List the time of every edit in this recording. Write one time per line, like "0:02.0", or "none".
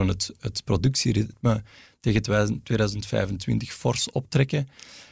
none